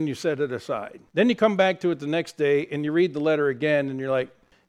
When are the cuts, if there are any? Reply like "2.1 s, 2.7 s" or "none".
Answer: 1.1 s